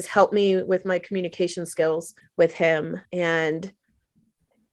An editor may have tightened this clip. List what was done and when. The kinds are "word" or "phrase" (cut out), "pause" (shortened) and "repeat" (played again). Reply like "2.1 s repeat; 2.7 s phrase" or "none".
2.2 s pause; 3.0 s pause